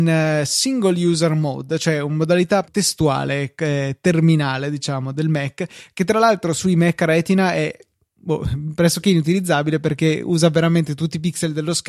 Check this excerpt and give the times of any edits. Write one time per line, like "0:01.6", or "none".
0:02.6